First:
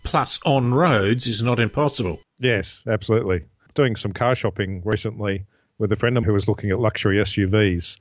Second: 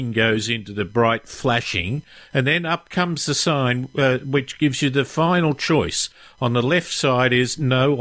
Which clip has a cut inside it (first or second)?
first